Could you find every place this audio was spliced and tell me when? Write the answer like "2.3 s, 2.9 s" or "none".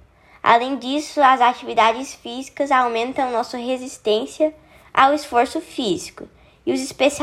none